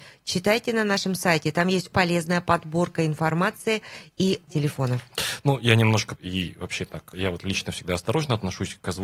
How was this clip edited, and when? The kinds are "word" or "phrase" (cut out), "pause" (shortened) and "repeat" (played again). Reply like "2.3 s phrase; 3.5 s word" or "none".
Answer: 1.9 s word; 4.5 s word; 6.2 s word; 7.1 s word